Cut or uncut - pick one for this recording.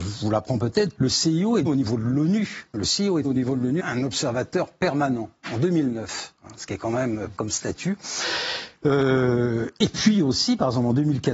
cut